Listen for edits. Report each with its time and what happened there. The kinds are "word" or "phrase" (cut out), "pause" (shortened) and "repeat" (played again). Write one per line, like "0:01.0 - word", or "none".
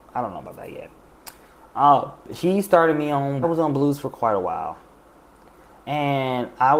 0:03.4 - phrase